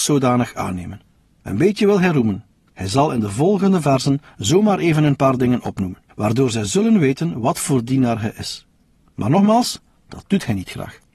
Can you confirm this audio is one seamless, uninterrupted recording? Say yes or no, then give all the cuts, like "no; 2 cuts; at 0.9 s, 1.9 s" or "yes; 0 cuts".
yes; 0 cuts